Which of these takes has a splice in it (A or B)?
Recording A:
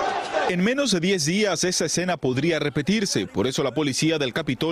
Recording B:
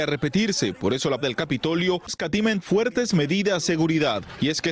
B